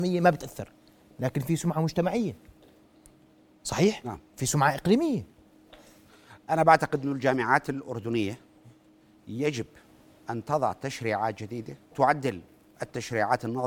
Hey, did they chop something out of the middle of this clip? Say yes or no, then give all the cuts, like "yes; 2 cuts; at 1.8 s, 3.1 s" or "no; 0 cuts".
yes; 1 cut; at 11.9 s